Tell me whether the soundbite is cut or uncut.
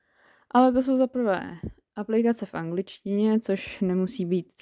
uncut